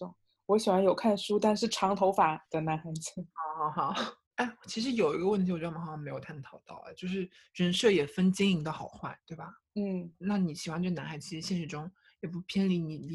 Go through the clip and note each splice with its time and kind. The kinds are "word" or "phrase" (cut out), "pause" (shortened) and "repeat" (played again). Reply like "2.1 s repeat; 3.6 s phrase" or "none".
3.3 s pause; 10.1 s pause